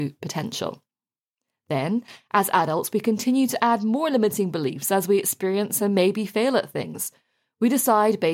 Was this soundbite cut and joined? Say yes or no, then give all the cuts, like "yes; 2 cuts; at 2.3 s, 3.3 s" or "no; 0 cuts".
no; 0 cuts